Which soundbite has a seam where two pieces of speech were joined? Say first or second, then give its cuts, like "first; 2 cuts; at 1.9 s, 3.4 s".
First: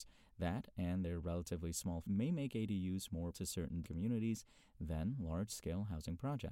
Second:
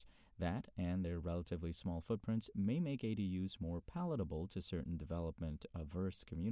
first; 3 cuts; at 2.0 s, 3.3 s, 3.8 s